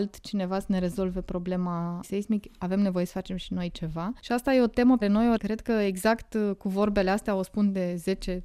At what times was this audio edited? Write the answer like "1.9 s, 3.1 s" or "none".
2.0 s, 5.0 s, 5.4 s